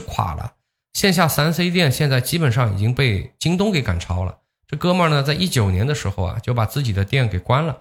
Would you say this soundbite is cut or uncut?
uncut